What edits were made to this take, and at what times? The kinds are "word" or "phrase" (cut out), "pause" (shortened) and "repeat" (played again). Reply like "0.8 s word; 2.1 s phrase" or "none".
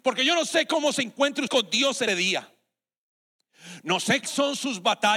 1.5 s word; 2.1 s word; 4.2 s word

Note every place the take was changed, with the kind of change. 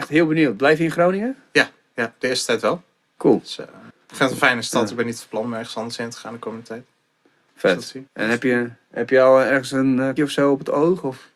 3.9 s pause; 8.1 s pause; 10.2 s word

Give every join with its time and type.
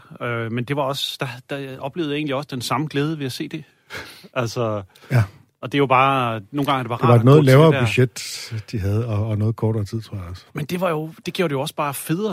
10.5 s pause

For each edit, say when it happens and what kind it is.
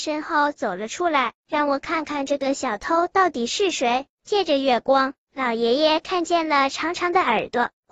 1.4 s pause

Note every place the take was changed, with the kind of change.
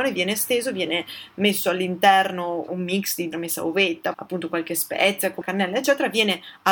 2.7 s word; 3.3 s phrase; 4.1 s phrase; 5.4 s word

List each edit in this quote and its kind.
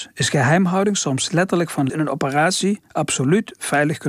1.9 s phrase

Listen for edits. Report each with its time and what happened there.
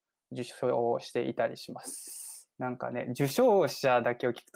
2.5 s pause

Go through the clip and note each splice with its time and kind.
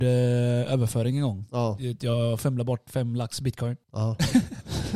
3.8 s pause

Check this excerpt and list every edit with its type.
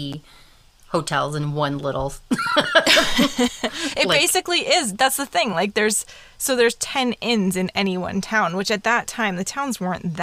none

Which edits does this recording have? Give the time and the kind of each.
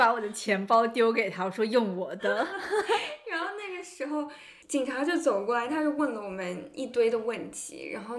4.6 s pause

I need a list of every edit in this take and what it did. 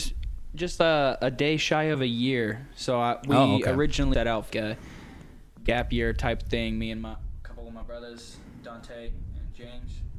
4.1 s word; 4.5 s word

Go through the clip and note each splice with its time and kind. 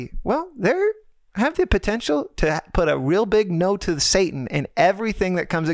none

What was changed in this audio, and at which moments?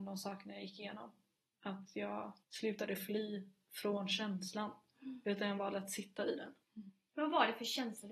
2.4 s pause; 6.6 s pause

